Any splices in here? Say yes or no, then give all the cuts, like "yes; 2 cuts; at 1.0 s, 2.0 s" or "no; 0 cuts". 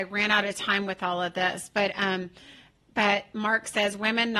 no; 0 cuts